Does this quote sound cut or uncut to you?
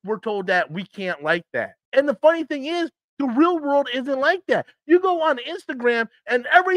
cut